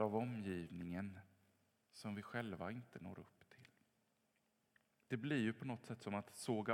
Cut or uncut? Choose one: uncut